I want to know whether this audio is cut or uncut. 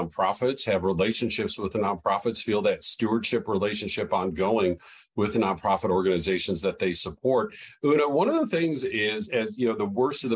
uncut